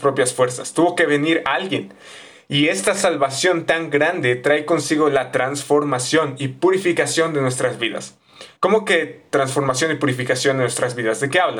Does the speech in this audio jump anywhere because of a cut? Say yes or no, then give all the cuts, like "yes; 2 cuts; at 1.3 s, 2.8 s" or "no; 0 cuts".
yes; 1 cut; at 8.6 s